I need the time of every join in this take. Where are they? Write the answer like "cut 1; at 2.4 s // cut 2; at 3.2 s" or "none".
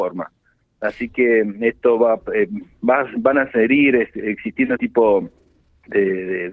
cut 1; at 4.8 s